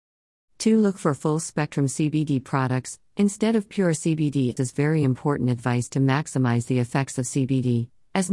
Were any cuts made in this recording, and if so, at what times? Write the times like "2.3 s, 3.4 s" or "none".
4.6 s